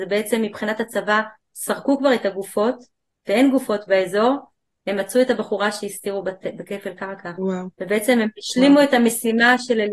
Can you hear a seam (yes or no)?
yes